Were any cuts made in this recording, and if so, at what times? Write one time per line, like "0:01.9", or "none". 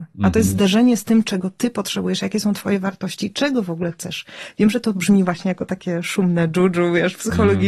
none